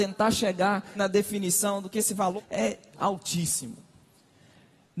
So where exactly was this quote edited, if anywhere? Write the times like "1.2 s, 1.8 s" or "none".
0.9 s, 2.4 s, 2.9 s